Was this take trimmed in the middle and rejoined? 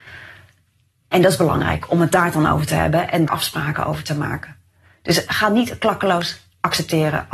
yes; 1 cut; at 3.3 s

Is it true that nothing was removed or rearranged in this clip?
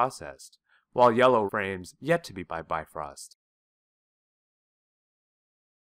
no; 2 cuts; at 1.5 s, 2.4 s

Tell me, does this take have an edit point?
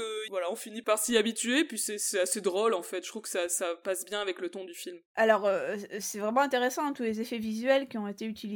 yes; 1 cut; at 5.1 s

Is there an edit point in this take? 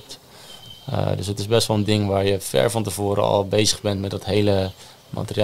no; 0 cuts

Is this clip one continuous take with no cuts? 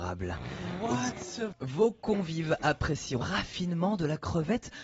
no; 2 cuts; at 1.5 s, 3.2 s

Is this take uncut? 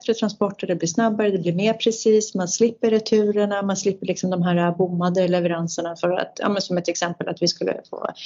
yes; 0 cuts

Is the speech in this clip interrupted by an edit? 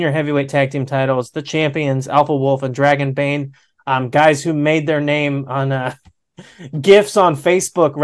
no; 0 cuts

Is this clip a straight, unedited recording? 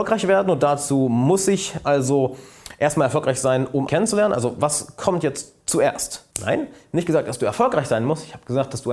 no; 2 cuts; at 3.9 s, 6.3 s

